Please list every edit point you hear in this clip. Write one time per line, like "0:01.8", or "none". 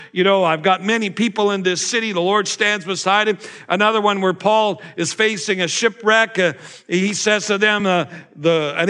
none

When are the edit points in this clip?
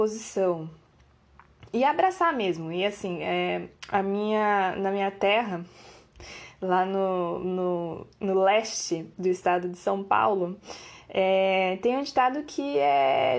0:03.8
0:08.1

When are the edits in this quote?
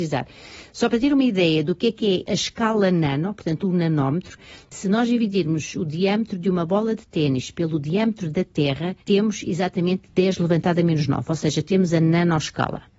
0:09.0

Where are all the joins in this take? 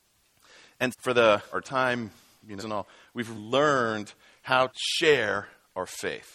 0:00.9
0:01.5
0:02.6
0:03.3
0:04.7

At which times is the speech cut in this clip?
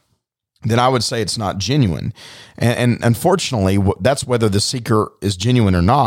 none

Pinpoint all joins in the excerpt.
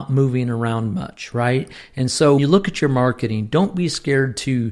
0:02.4

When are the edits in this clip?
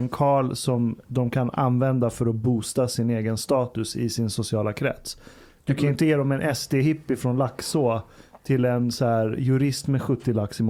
0:01.0

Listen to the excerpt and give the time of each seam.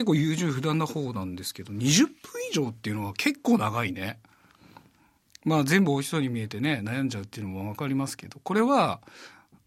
none

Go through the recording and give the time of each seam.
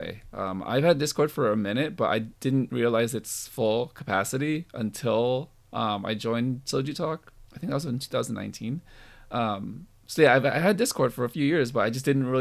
0:02.3
0:05.6
0:07.5

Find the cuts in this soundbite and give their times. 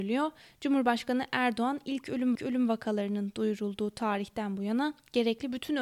0:02.3

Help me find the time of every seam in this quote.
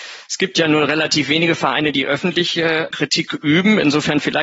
0:02.9

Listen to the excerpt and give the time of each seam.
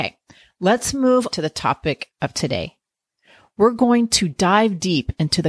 0:01.3

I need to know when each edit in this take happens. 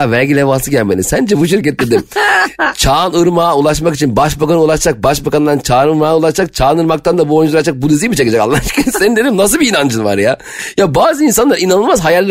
none

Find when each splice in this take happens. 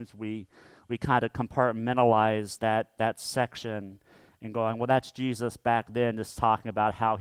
none

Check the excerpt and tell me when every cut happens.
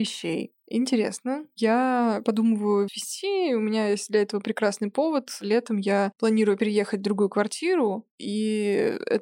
0:02.9

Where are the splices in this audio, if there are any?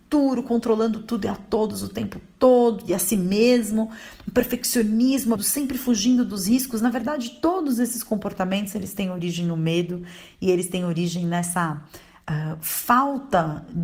0:05.4

